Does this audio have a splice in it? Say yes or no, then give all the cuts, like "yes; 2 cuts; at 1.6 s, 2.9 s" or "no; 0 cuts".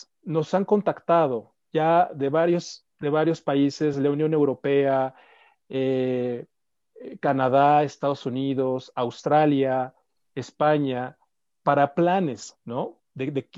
no; 0 cuts